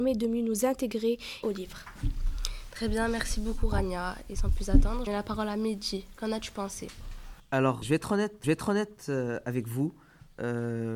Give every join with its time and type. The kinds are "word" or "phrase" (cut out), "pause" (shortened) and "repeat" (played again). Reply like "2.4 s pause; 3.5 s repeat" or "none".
1.4 s phrase; 5.1 s phrase; 7.8 s word; 8.4 s repeat